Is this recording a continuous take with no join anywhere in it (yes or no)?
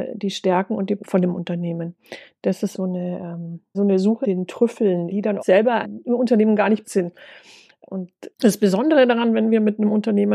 no